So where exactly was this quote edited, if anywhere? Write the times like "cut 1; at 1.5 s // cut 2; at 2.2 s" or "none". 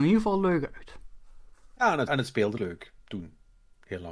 cut 1; at 2.1 s // cut 2; at 2.6 s